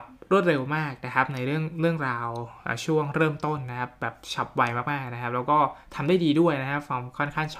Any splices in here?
no; 0 cuts

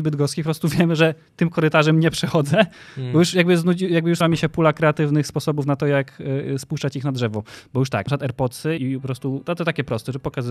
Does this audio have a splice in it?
yes; 3 cuts; at 4.2 s, 8.1 s, 8.8 s

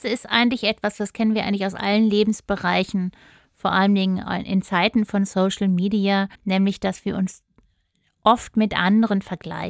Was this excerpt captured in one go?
no; 1 cut; at 6.3 s

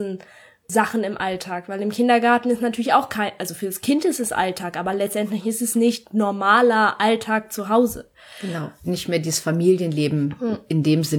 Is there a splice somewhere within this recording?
no; 0 cuts

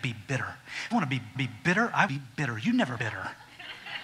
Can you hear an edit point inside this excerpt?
yes; 4 cuts; at 0.9 s, 1.3 s, 2.1 s, 3.0 s

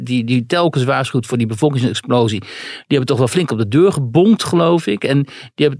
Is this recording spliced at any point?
no; 0 cuts

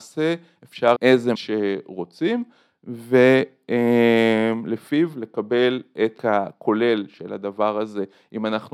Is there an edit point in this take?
yes; 3 cuts; at 1.0 s, 1.3 s, 6.2 s

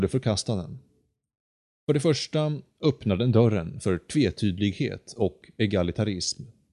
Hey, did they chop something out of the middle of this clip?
no; 0 cuts

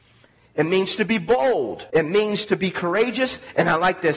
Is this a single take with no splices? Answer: no; 1 cut; at 1.9 s

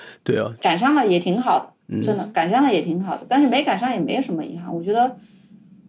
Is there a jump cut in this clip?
no; 0 cuts

